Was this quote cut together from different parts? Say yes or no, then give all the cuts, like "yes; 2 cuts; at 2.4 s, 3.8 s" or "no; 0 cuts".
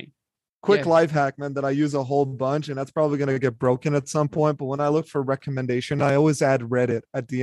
no; 0 cuts